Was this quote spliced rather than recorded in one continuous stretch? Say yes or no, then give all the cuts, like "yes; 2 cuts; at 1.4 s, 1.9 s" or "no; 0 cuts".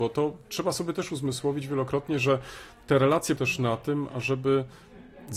yes; 1 cut; at 3.4 s